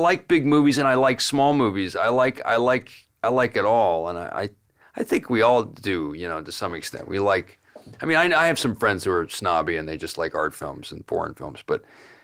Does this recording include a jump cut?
no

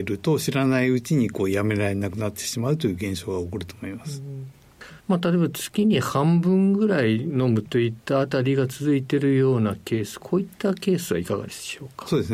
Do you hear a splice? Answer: yes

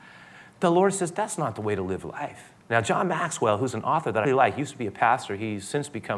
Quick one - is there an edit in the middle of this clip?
yes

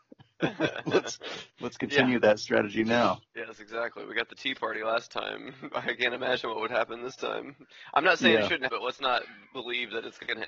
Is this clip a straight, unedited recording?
no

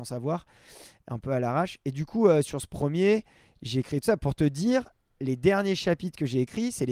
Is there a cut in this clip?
no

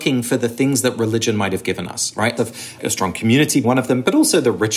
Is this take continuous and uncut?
no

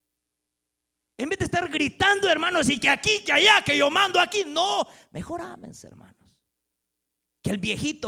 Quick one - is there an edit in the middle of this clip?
no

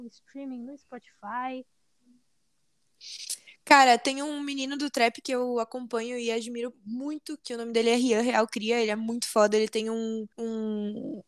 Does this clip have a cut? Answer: yes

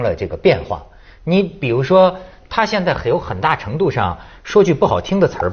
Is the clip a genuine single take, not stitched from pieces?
yes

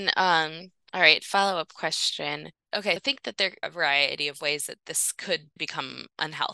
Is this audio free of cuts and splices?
no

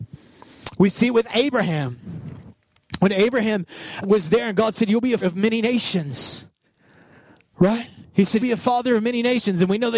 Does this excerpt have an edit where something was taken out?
yes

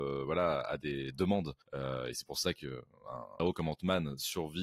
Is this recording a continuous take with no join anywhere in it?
no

